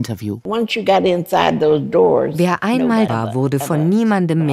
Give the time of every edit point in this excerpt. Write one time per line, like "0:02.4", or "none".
0:03.1